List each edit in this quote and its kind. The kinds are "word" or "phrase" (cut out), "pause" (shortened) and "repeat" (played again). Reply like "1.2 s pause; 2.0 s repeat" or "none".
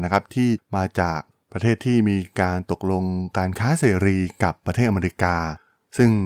none